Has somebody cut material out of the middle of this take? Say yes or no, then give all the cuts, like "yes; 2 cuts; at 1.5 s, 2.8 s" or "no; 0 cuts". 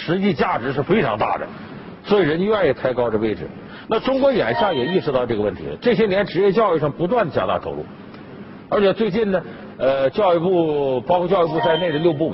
no; 0 cuts